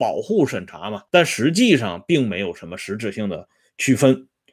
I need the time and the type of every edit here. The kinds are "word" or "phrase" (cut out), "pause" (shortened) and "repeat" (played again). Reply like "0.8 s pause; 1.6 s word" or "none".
1.1 s pause